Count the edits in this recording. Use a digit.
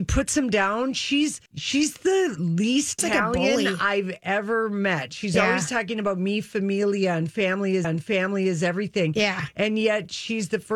3